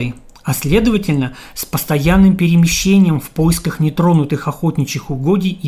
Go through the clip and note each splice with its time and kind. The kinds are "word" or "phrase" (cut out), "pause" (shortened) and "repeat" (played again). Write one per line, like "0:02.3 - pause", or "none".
none

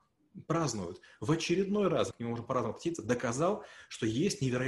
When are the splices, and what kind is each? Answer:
0:02.1 - word

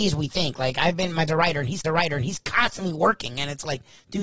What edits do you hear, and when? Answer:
0:01.3 - word
0:01.8 - repeat

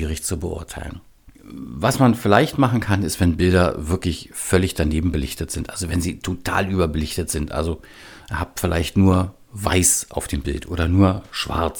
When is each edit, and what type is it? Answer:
0:01.3 - pause

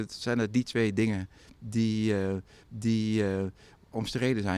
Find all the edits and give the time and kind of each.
0:02.6 - repeat

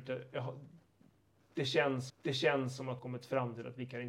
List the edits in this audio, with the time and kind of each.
0:02.1 - repeat
0:03.0 - phrase

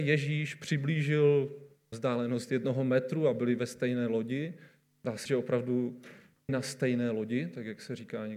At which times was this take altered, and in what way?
0:01.9 - word
0:05.3 - word
0:06.5 - word

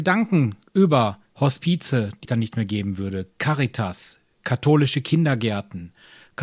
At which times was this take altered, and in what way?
0:02.2 - phrase

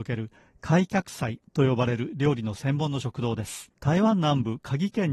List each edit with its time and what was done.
0:03.8 - pause

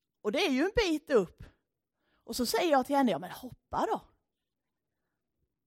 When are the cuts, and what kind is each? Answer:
none

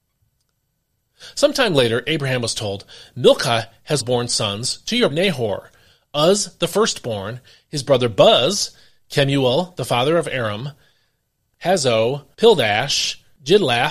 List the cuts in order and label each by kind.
0:04.0 - word
0:05.1 - word
0:11.5 - word

